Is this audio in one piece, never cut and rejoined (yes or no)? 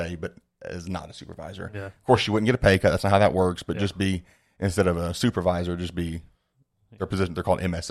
yes